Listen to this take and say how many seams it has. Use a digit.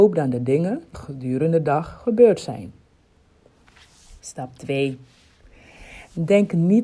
2